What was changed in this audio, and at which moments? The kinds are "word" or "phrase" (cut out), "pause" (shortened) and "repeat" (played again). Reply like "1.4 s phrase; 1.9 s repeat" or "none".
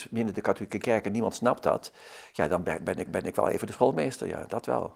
3.1 s repeat